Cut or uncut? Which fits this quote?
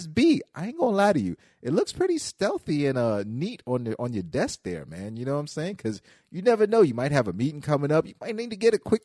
uncut